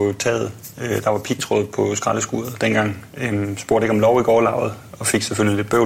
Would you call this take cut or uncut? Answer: uncut